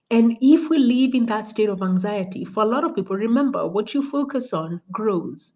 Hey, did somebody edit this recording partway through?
no; 0 cuts

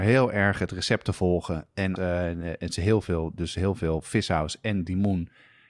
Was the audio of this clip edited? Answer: yes; 1 cut; at 2.0 s

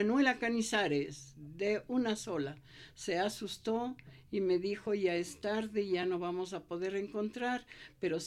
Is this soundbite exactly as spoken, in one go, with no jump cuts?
yes; 0 cuts

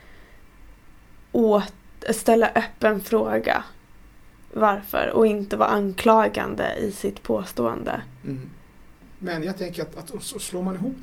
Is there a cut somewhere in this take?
no; 0 cuts

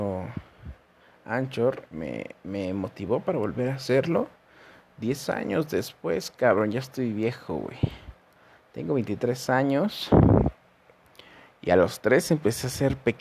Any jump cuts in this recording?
no; 0 cuts

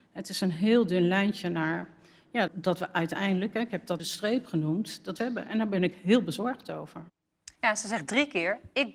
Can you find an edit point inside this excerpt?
yes; 4 cuts; at 2.5 s, 4.0 s, 5.2 s, 7.6 s

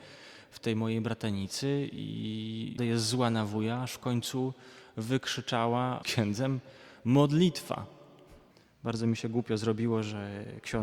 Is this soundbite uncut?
no; 3 cuts; at 2.8 s, 6.0 s, 8.5 s

